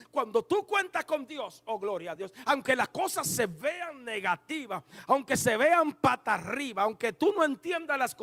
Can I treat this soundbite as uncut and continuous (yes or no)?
yes